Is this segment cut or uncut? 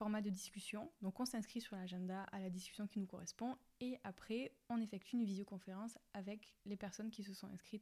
uncut